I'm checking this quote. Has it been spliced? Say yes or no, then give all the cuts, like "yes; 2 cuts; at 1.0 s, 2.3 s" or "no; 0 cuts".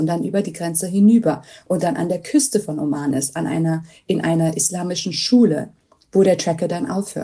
no; 0 cuts